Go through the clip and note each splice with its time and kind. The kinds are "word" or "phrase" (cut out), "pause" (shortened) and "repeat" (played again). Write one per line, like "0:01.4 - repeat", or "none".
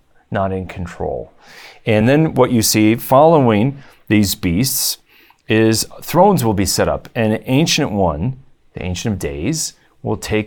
none